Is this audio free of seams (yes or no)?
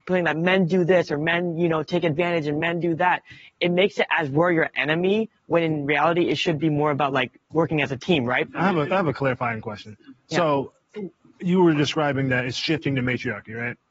yes